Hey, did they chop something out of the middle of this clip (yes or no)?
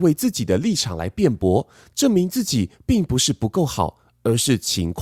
no